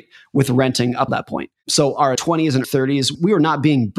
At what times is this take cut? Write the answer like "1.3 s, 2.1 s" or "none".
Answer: 1.1 s, 2.1 s, 2.6 s

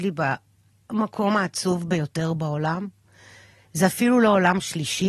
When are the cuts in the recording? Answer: none

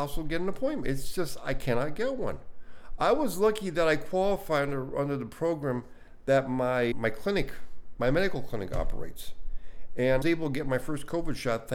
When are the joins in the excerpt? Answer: 6.9 s, 10.2 s

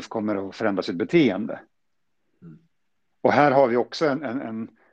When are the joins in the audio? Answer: none

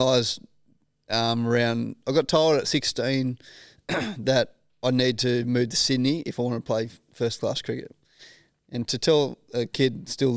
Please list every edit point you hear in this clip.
none

